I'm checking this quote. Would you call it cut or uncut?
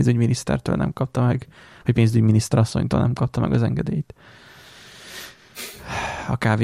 uncut